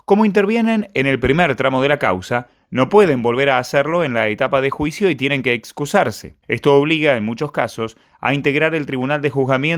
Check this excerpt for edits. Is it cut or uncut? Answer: cut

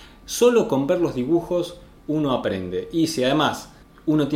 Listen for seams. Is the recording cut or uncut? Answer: uncut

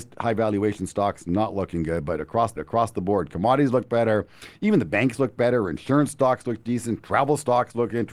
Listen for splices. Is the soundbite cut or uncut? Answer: cut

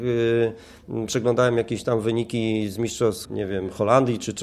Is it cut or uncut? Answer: cut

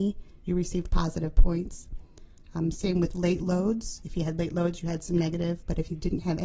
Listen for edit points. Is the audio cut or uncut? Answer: uncut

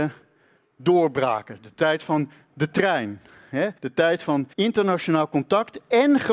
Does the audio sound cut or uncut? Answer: cut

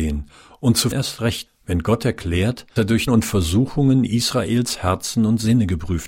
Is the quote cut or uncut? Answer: cut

